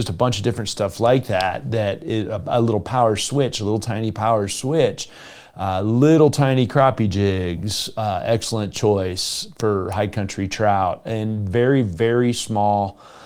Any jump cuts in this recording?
no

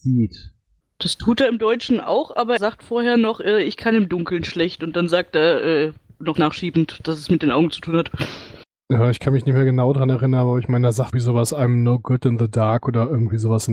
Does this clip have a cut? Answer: yes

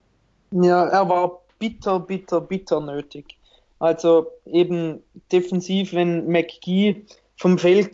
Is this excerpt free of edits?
yes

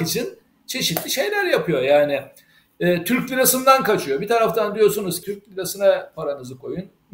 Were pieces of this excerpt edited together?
yes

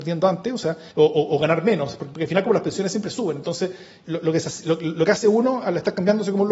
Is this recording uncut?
no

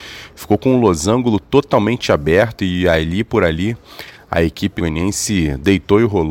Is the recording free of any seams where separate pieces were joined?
no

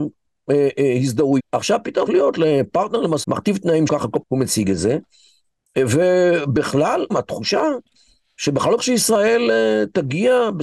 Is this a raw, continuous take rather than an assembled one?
no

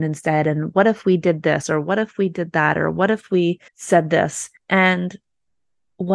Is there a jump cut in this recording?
yes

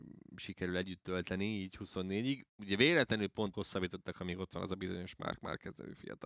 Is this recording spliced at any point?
yes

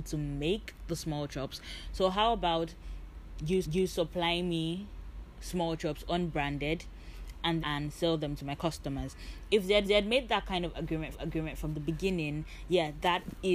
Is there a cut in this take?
yes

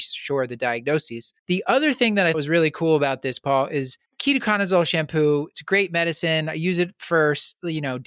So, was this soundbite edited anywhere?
yes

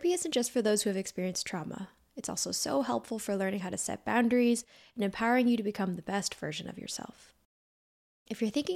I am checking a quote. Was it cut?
no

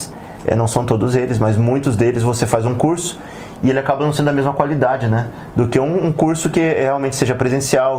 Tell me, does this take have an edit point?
no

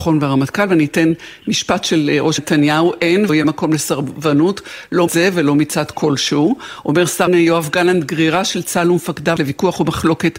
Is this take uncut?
no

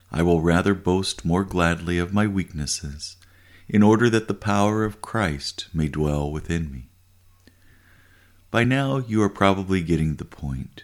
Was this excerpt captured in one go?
yes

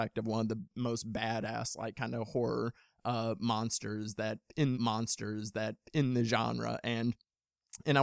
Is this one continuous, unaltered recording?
no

